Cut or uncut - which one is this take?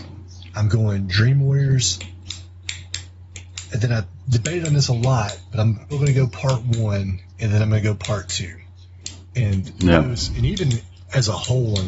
cut